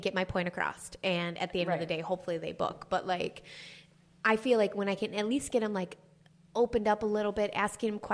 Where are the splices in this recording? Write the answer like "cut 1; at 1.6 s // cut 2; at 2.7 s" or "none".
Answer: none